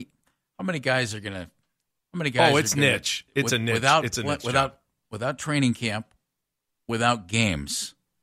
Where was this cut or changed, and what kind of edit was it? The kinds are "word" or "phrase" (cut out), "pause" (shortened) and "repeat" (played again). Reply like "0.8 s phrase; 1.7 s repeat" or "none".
none